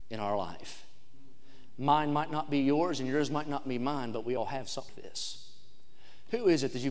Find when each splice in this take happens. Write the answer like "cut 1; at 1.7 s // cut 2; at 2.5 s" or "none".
cut 1; at 4.9 s

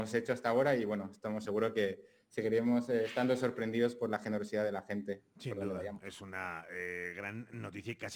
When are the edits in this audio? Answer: none

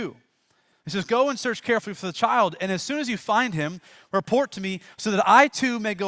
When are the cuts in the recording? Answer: none

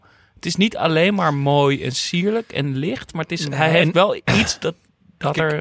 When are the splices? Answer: none

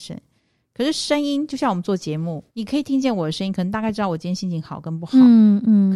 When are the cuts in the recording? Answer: cut 1; at 2.5 s

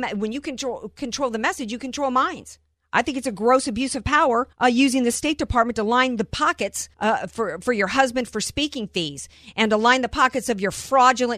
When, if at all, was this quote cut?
cut 1; at 2.7 s // cut 2; at 4.5 s // cut 3; at 6.9 s

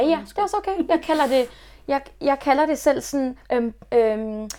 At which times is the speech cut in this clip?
cut 1; at 3.4 s

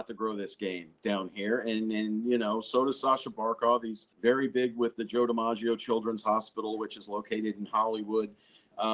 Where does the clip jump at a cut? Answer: cut 1; at 4.1 s

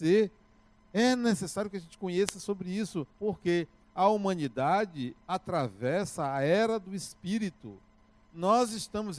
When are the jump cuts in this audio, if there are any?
cut 1; at 3.1 s

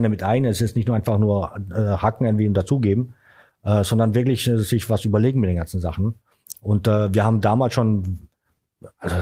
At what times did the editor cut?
none

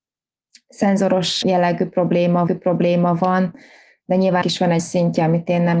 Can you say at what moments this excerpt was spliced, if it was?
cut 1; at 1.4 s // cut 2; at 2.5 s // cut 3; at 4.4 s // cut 4; at 4.8 s

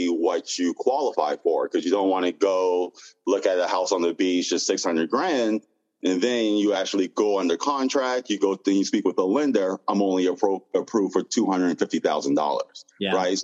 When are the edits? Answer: none

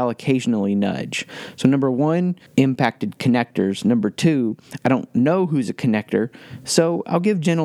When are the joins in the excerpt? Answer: cut 1; at 2.5 s

